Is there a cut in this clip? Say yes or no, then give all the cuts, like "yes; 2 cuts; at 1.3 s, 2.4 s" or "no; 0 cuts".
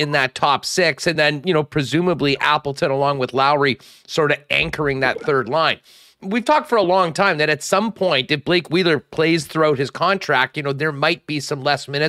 no; 0 cuts